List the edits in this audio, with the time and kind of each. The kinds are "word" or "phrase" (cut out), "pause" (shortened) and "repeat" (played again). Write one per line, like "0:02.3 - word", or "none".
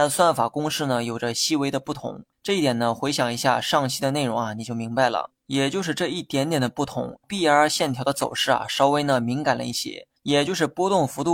0:02.3 - pause
0:05.4 - pause
0:07.2 - word
0:10.2 - pause